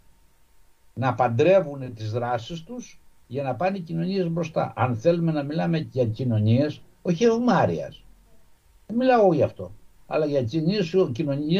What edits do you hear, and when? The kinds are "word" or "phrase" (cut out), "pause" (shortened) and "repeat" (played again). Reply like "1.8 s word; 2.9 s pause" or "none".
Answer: none